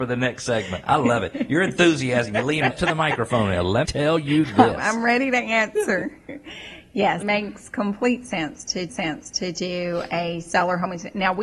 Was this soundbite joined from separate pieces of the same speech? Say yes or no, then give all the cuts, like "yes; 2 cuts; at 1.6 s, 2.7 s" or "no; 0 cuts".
yes; 4 cuts; at 2.7 s, 3.8 s, 7.2 s, 8.9 s